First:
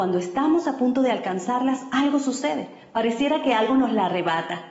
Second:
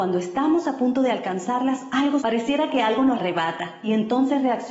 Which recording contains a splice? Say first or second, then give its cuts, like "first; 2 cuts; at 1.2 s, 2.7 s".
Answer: second; 2 cuts; at 2.2 s, 3.2 s